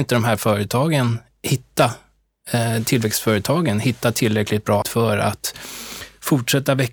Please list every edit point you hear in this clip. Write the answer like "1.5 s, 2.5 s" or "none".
4.8 s

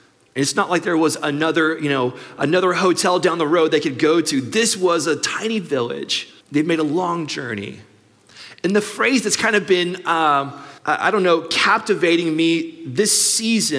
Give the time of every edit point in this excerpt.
6.4 s, 10.8 s

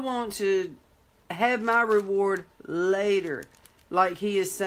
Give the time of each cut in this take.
none

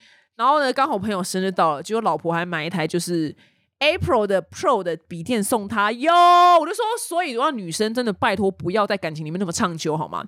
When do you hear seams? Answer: none

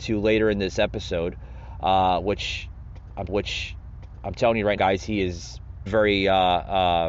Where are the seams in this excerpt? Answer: 3.3 s, 4.8 s, 5.9 s

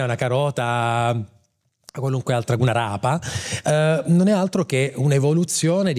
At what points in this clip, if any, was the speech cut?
none

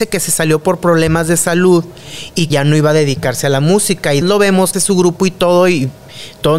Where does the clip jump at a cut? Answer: 2.5 s, 4.2 s, 4.7 s

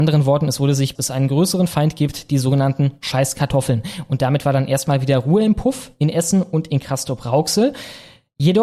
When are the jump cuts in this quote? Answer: 0.9 s

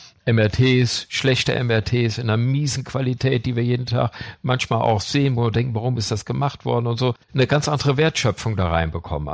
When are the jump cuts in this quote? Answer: 7.2 s

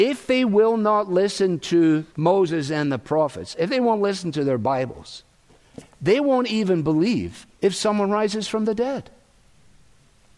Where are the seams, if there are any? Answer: 2.1 s, 7.5 s

